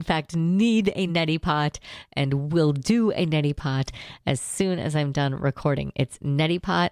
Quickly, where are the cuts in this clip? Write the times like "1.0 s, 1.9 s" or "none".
none